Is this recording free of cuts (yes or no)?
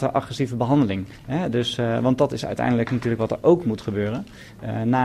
no